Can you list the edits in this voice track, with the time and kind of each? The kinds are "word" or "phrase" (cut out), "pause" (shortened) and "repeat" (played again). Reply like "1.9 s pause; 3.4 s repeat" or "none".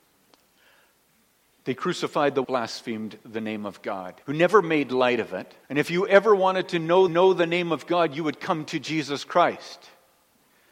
2.4 s phrase; 4.2 s pause; 5.6 s pause; 7.1 s repeat